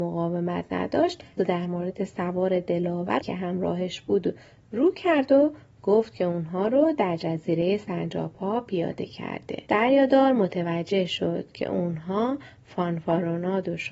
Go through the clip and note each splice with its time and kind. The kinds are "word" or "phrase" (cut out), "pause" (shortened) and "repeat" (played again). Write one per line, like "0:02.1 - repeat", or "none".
0:01.4 - phrase
0:03.2 - phrase
0:09.7 - pause